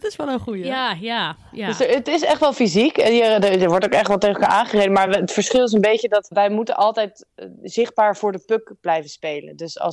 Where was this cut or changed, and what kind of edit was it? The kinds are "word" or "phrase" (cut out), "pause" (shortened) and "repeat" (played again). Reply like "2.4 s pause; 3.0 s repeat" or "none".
none